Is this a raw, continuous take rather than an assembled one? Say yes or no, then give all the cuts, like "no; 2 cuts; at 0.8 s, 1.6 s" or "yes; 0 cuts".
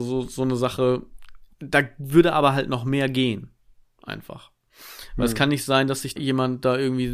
no; 2 cuts; at 1.5 s, 6.2 s